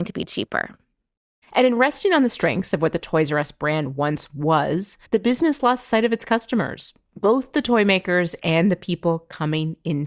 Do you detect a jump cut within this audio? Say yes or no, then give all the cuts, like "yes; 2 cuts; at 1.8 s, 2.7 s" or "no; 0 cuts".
yes; 1 cut; at 5.0 s